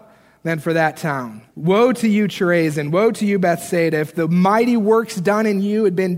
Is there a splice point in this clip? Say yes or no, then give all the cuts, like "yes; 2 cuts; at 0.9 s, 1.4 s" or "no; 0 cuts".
yes; 1 cut; at 1.5 s